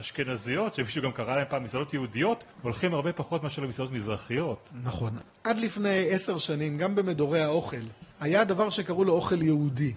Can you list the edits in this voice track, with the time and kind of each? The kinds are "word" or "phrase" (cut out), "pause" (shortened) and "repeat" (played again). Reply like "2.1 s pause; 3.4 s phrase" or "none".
2.5 s pause; 8.1 s pause